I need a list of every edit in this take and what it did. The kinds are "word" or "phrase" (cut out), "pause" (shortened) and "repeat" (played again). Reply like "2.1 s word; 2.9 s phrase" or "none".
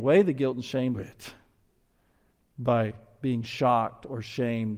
0.9 s phrase